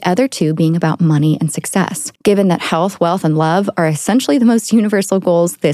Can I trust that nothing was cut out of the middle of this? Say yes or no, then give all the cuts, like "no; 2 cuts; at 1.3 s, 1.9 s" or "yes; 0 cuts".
no; 1 cut; at 2.2 s